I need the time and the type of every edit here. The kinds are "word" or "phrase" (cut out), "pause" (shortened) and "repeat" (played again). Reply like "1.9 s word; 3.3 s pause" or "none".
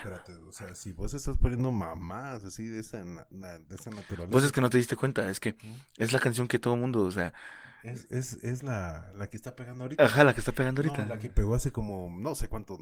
none